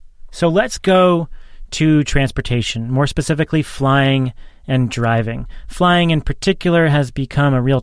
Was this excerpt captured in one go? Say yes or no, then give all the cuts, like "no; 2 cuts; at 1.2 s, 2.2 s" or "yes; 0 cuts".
yes; 0 cuts